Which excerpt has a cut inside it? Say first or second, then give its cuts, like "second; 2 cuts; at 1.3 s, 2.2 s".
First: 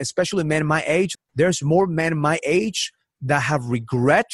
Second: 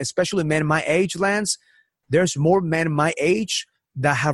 first; 1 cut; at 1.1 s